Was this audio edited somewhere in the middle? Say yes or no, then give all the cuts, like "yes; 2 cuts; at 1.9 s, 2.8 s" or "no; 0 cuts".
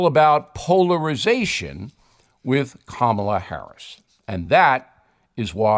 no; 0 cuts